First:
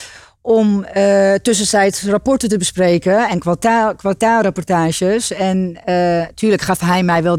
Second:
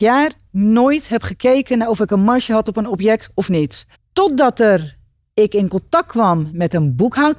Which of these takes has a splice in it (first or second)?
second